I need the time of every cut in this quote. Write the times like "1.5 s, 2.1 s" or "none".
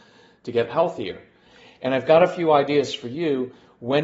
none